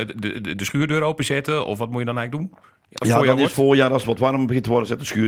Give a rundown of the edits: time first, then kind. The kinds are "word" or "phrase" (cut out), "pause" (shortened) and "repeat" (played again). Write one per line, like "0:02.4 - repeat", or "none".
none

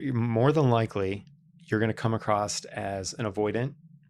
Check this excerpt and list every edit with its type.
none

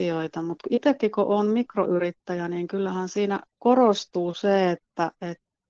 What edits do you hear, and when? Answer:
none

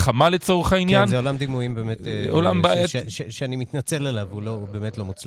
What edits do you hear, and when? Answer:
none

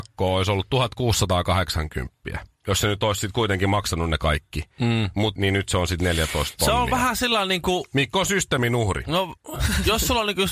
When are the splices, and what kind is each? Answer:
0:05.3 - word
0:09.4 - pause

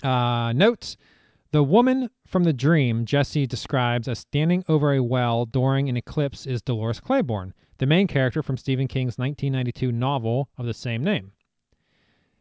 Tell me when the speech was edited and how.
none

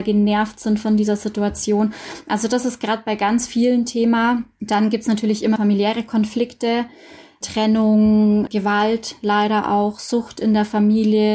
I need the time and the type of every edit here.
0:05.6 - word
0:08.5 - word

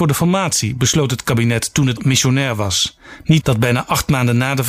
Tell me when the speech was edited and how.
0:02.0 - word
0:03.4 - word

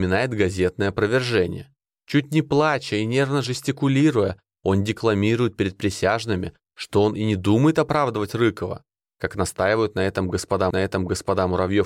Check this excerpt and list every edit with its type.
0:10.7 - repeat

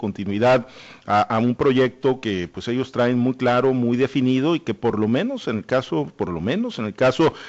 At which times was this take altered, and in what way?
none

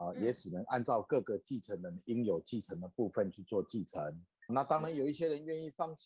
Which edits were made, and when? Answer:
0:04.5 - word

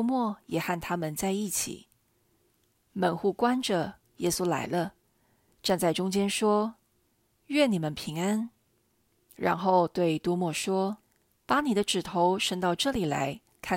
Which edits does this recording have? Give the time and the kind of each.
0:11.0 - pause

